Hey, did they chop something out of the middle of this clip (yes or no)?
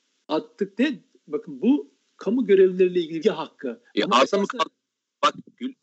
yes